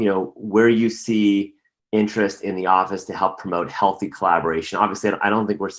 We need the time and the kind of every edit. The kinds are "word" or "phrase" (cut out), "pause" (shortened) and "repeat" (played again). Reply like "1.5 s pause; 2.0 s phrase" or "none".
none